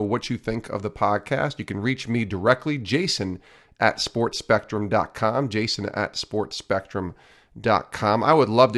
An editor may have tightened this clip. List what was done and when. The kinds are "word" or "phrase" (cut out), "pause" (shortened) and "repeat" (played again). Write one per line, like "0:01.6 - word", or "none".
none